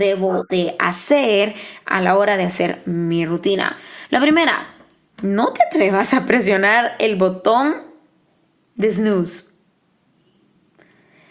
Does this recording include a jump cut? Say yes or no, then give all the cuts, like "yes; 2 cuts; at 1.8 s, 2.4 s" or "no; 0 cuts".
no; 0 cuts